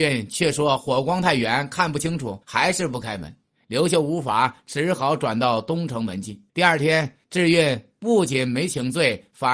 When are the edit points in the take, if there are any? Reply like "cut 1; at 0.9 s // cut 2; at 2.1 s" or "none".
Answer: cut 1; at 2.4 s // cut 2; at 6.5 s // cut 3; at 7.2 s